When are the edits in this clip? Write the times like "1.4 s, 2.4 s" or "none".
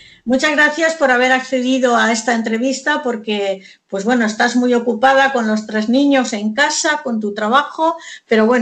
none